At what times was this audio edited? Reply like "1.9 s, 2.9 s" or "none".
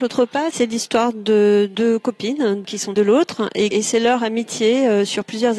3.0 s, 3.7 s

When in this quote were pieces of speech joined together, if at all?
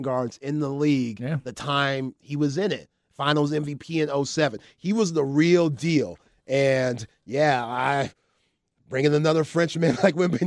none

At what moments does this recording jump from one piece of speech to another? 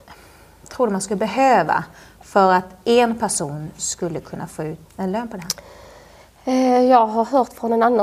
4.8 s

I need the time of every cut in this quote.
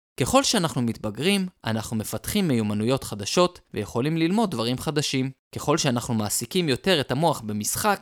1.6 s, 3.6 s, 5.4 s

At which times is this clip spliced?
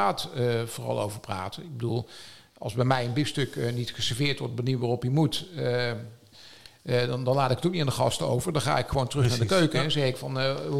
none

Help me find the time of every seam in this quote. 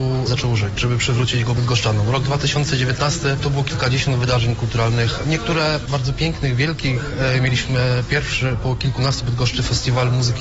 9.2 s

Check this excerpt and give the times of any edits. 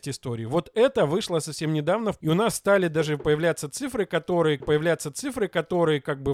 2.2 s, 4.6 s

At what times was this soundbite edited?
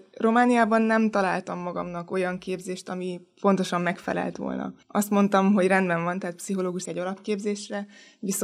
4.8 s, 6.8 s

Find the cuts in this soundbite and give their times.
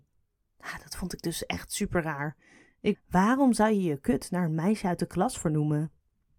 2.9 s

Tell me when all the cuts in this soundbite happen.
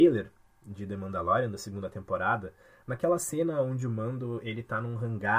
none

